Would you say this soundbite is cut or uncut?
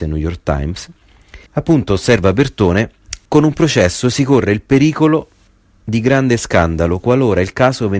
cut